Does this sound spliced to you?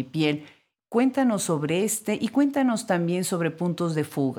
no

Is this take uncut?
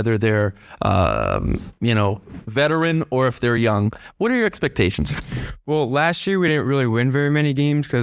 yes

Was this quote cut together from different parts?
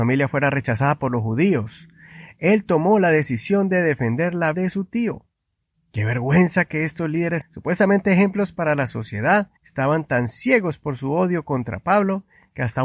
yes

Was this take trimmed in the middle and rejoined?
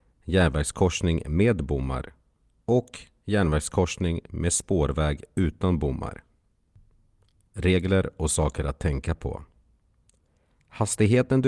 no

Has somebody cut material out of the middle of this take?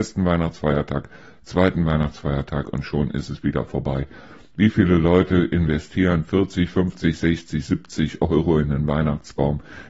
no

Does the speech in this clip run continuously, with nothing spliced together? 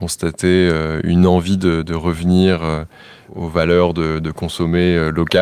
yes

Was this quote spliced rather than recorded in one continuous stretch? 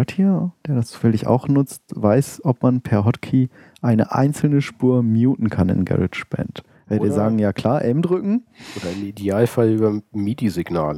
no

